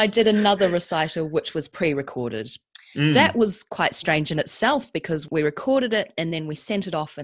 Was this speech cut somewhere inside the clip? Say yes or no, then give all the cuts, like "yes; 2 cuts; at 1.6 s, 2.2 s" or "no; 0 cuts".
no; 0 cuts